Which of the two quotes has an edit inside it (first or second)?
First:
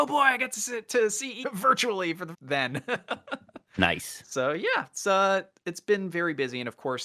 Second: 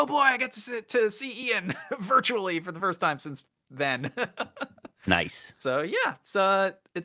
first